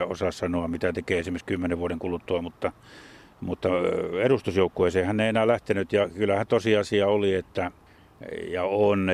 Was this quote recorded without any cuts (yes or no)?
yes